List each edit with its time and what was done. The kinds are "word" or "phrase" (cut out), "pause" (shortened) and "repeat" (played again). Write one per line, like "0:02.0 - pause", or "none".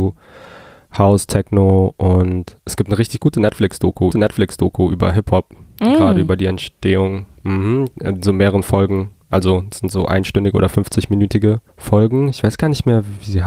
0:04.1 - repeat
0:11.7 - pause

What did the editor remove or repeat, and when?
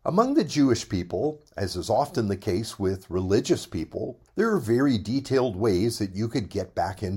0:04.3 - pause

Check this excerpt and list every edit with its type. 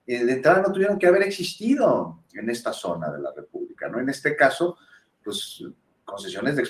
none

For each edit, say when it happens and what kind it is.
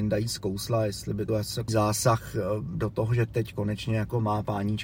0:01.3 - phrase
0:01.7 - phrase

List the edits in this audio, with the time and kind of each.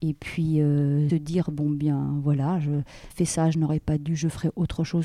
0:01.1 - word
0:03.1 - word

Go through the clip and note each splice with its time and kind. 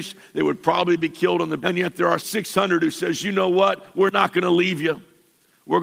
0:01.6 - word
0:02.2 - word

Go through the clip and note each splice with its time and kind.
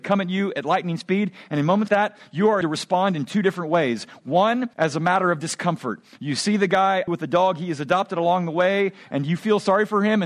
0:01.9 - word
0:02.6 - word
0:04.7 - pause
0:07.1 - phrase

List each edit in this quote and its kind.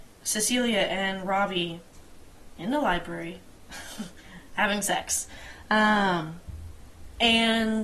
none

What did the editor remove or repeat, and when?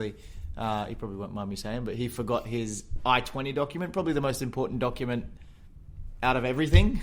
none

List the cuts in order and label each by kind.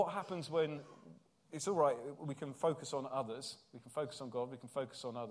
none

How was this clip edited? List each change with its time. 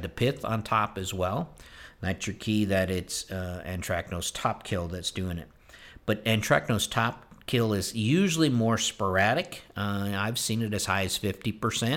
none

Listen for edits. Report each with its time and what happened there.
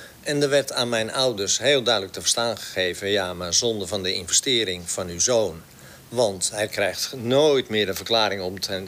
none

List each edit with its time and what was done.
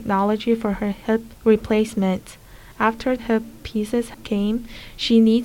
0:03.2 - word

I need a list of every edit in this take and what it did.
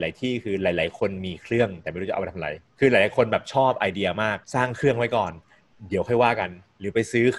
0:04.4 - pause

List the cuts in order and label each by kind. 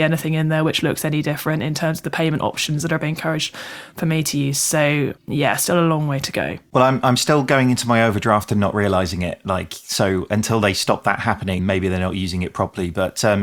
0:05.2 - pause
0:11.6 - word

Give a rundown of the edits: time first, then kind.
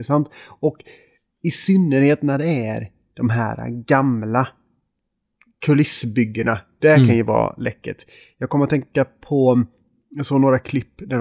none

